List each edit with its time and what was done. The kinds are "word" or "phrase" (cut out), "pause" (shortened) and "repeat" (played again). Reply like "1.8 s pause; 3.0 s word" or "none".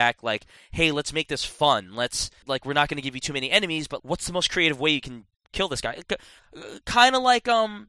2.4 s word; 4.0 s word